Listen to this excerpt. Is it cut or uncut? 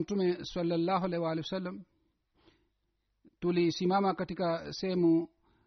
uncut